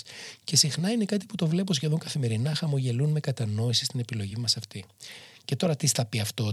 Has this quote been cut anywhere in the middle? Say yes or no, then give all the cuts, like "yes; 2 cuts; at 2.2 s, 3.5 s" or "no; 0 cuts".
no; 0 cuts